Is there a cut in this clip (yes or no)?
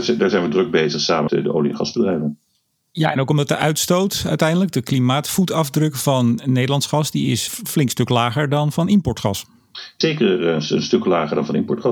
yes